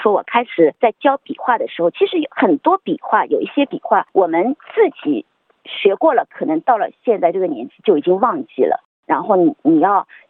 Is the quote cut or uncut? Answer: uncut